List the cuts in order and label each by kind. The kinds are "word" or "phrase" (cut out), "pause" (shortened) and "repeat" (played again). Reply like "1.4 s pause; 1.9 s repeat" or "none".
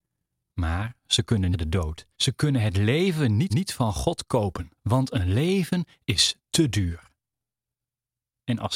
1.5 s phrase; 2.1 s pause; 3.5 s repeat; 4.8 s pause